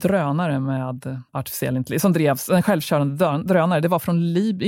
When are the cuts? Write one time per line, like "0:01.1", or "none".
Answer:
0:01.3